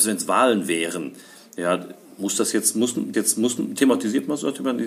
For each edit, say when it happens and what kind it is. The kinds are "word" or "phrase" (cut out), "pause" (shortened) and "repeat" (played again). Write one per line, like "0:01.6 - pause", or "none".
0:03.1 - repeat